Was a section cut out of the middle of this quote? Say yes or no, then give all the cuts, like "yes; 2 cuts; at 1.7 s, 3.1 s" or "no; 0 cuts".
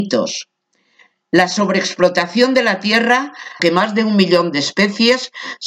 yes; 1 cut; at 3.6 s